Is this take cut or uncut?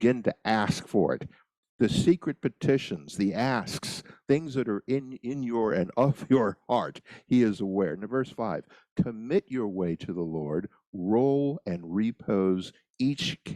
uncut